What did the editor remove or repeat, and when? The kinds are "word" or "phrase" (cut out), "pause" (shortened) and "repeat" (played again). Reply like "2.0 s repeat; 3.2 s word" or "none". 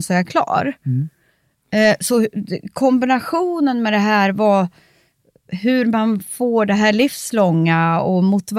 none